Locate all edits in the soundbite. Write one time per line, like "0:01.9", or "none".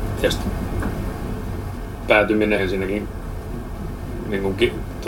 0:02.6

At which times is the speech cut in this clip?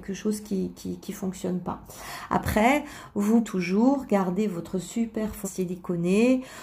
0:03.4
0:05.4

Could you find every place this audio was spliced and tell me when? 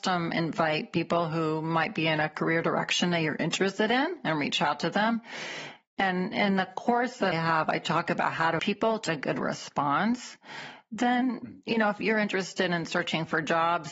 0:07.3
0:08.6
0:09.1

